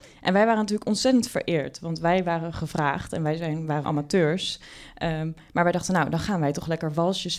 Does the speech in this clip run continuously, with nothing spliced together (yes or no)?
no